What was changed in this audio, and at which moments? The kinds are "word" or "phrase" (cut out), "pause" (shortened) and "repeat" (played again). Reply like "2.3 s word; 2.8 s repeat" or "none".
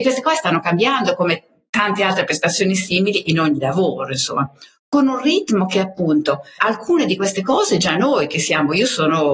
6.6 s word